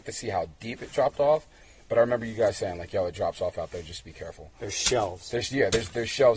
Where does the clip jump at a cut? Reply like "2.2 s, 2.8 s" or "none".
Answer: none